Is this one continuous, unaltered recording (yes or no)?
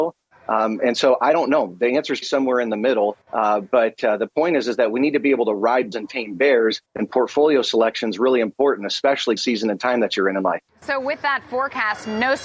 no